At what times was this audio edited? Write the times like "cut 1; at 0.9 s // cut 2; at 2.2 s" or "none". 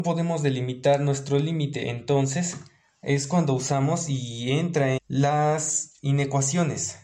cut 1; at 5.0 s